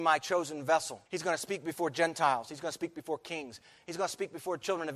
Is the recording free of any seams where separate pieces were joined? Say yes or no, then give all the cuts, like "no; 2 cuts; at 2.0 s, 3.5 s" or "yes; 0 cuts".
no; 1 cut; at 1.1 s